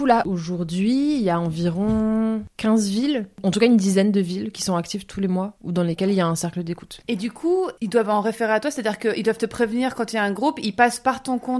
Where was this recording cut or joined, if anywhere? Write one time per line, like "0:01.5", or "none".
none

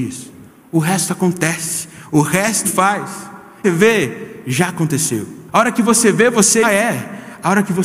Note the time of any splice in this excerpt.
0:02.6
0:03.6
0:05.5
0:06.6

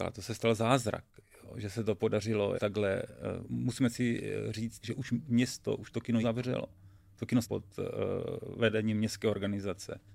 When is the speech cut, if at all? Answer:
0:02.6
0:04.8
0:06.2
0:07.4

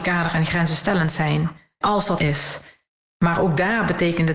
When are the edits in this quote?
0:01.8
0:02.2

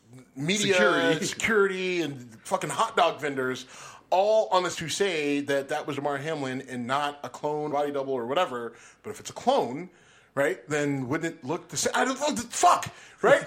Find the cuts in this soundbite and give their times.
0:04.7
0:05.9
0:07.7

